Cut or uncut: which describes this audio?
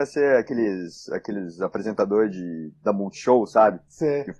uncut